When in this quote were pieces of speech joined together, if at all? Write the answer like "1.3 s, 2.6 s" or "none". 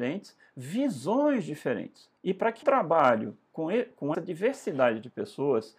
2.2 s, 2.6 s, 4.1 s